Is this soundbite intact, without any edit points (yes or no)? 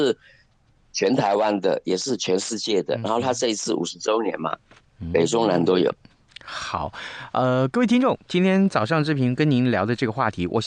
yes